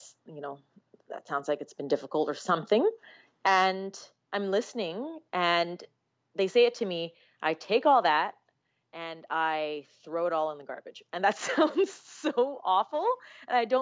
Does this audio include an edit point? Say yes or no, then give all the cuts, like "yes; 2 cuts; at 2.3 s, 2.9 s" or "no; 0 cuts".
no; 0 cuts